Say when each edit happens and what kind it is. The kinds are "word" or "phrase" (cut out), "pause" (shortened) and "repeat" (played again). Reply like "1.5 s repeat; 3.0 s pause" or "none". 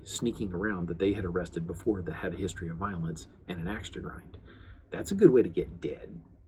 none